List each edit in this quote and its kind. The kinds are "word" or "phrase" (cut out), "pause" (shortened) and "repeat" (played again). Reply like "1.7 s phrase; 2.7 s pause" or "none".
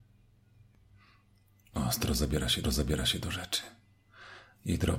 2.6 s repeat